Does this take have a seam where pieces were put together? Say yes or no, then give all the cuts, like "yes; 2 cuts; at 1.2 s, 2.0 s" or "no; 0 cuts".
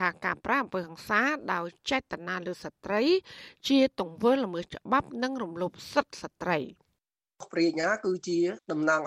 no; 0 cuts